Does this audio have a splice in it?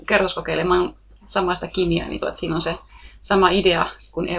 yes; 1 cut; at 2.2 s

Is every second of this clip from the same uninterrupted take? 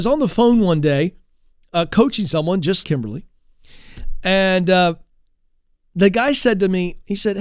no; 1 cut; at 2.8 s

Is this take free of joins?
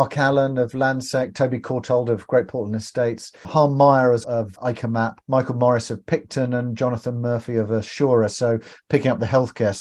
no; 2 cuts; at 4.2 s, 5.2 s

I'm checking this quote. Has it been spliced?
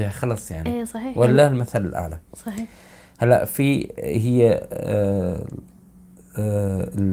no; 0 cuts

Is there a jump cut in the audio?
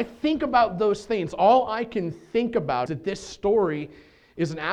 yes; 1 cut; at 2.9 s

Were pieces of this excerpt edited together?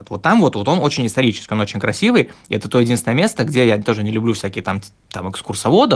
no; 0 cuts

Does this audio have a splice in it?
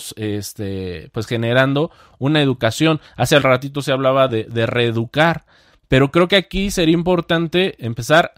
no; 0 cuts

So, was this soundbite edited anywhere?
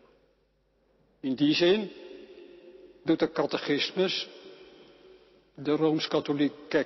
no; 0 cuts

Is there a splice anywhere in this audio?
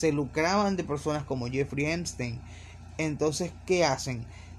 no; 0 cuts

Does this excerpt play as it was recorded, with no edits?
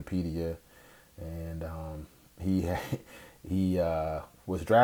yes; 0 cuts

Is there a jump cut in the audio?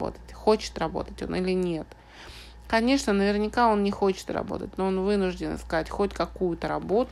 no; 0 cuts

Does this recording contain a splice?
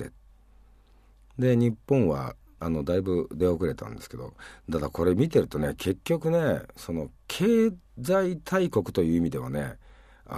yes; 1 cut; at 2.4 s

